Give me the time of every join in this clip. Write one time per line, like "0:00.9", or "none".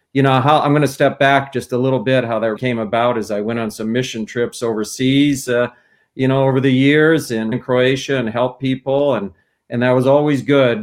0:02.6
0:07.5